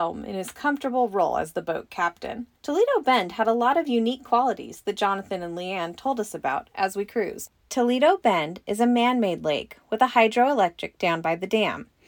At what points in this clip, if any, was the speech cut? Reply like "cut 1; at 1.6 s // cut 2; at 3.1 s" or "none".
cut 1; at 2.5 s // cut 2; at 7.6 s // cut 3; at 11.0 s